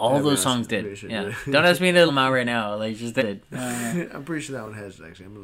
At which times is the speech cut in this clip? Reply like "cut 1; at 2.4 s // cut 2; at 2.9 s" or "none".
cut 1; at 2.1 s // cut 2; at 3.2 s